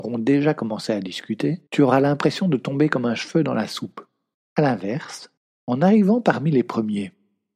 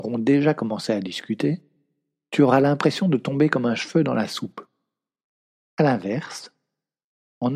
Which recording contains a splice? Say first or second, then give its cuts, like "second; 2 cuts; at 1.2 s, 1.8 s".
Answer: first; 3 cuts; at 1.7 s, 4.3 s, 5.4 s